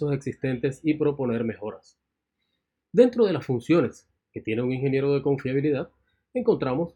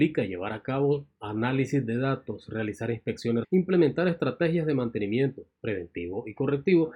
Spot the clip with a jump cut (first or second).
second